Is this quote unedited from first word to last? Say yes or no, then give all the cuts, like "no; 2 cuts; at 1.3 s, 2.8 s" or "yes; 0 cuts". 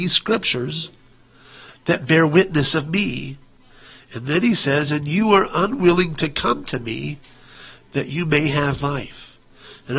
yes; 0 cuts